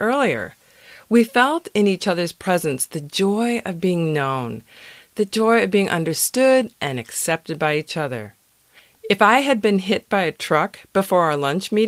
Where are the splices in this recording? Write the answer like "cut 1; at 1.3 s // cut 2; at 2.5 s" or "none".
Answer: none